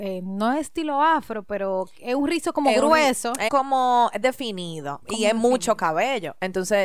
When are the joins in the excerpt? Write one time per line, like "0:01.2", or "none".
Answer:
0:03.5
0:04.2
0:05.0